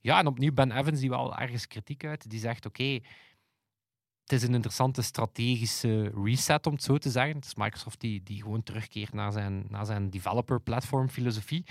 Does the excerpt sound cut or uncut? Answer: uncut